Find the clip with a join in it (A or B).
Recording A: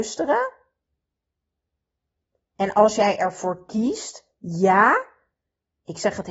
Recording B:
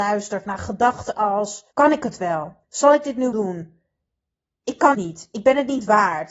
B